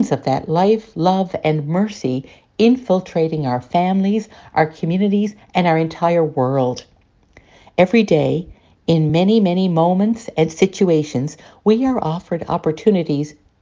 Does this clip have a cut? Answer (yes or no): no